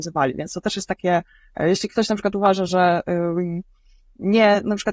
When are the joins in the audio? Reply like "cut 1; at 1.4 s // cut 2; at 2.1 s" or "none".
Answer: none